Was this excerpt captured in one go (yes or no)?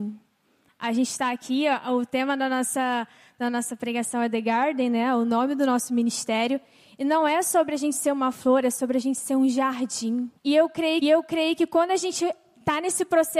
no